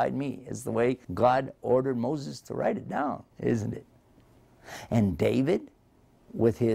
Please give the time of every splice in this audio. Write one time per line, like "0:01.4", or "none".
0:01.0
0:03.3

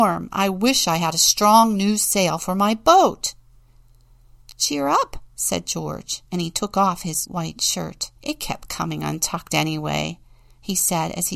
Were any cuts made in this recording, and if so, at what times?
0:06.3
0:07.2
0:08.2

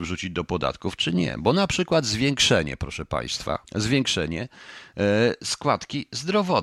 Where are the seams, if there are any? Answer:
0:03.7

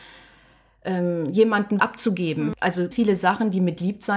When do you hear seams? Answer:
0:01.8
0:02.9

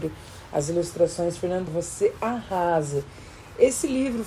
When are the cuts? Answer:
0:01.7

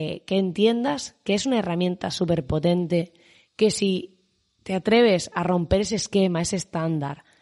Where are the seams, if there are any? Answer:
none

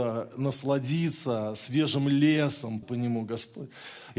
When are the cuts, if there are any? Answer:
0:02.8

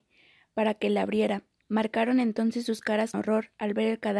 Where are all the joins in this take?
0:01.6
0:03.1

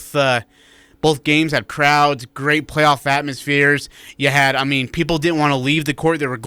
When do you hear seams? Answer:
0:01.7

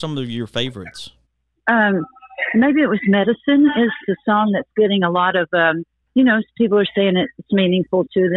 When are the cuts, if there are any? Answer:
0:01.3
0:04.1
0:06.0

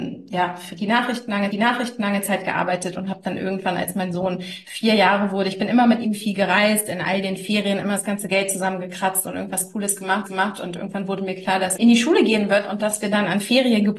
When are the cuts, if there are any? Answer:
0:01.5
0:10.3
0:11.8

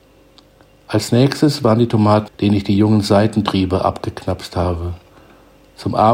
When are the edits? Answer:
0:02.3

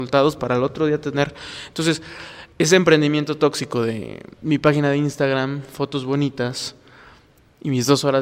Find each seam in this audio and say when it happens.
0:02.5
0:04.3

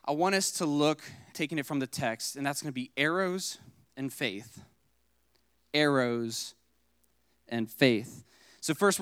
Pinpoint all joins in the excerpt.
0:01.3

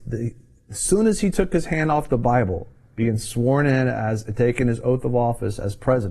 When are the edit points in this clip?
none

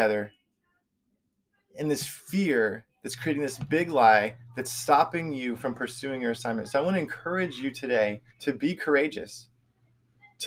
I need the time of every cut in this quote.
0:08.3

